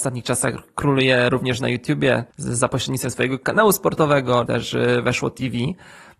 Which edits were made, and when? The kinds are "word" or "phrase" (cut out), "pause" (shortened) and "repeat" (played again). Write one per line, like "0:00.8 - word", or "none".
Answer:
0:02.3 - pause
0:04.5 - word